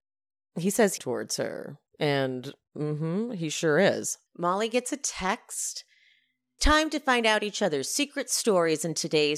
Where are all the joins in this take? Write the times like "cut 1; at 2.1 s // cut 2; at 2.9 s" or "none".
cut 1; at 1.0 s // cut 2; at 1.9 s // cut 3; at 4.3 s // cut 4; at 6.6 s